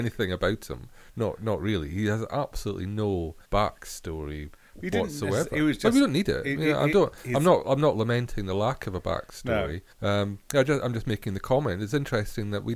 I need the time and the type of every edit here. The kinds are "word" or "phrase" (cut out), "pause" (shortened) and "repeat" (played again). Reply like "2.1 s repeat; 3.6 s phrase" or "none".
3.4 s pause; 9.9 s pause